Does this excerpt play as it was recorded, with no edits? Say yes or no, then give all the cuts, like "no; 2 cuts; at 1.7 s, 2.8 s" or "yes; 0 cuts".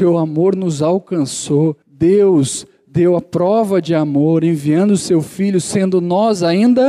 no; 1 cut; at 1.8 s